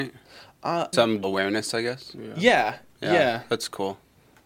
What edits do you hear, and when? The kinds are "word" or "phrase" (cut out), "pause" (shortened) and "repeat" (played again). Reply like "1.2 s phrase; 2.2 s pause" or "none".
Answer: 0.9 s word; 1.2 s word